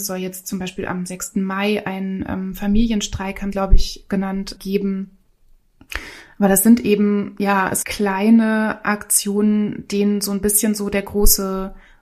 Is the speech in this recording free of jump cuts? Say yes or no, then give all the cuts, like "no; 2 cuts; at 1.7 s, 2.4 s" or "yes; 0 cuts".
no; 3 cuts; at 3.5 s, 4.6 s, 7.8 s